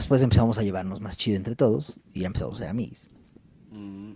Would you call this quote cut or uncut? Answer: uncut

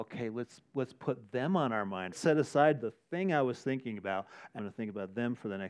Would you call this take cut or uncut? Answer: cut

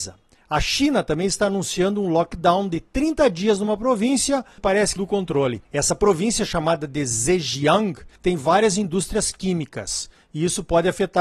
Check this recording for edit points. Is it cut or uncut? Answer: cut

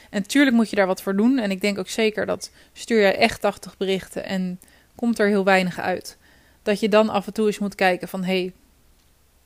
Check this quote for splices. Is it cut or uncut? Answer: uncut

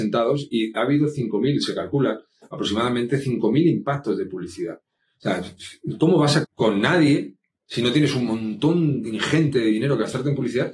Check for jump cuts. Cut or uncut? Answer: cut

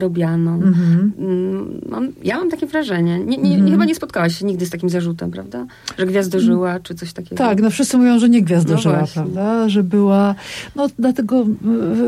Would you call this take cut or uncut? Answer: uncut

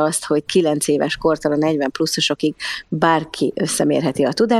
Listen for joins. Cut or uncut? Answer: uncut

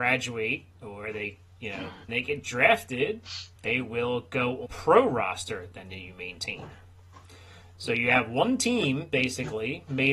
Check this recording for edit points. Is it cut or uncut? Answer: cut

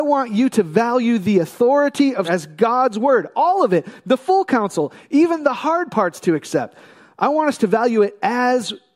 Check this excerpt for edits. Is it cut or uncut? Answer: cut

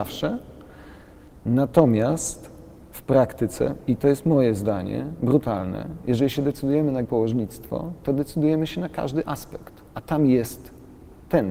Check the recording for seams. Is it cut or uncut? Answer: cut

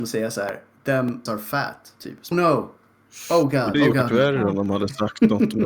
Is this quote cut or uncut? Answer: cut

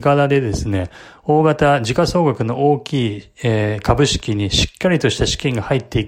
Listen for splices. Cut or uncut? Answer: uncut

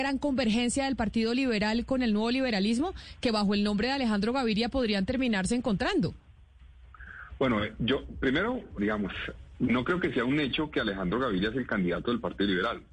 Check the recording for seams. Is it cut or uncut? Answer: cut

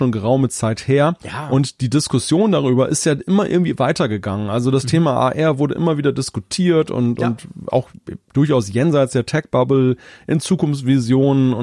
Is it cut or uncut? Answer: uncut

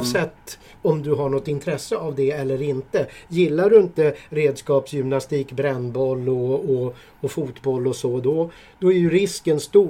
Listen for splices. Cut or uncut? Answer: uncut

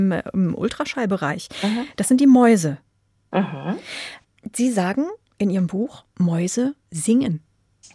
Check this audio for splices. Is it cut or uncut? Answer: cut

